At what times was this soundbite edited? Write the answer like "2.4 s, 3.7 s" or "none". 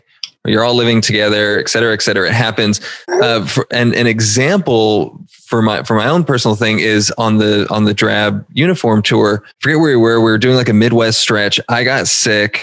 3.0 s, 3.7 s, 9.5 s